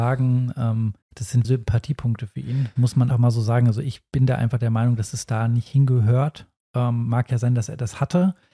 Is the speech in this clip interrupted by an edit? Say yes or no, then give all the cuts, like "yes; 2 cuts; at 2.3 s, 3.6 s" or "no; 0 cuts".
yes; 3 cuts; at 1.0 s, 1.4 s, 3.1 s